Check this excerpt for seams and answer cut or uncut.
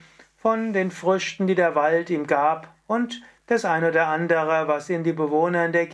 uncut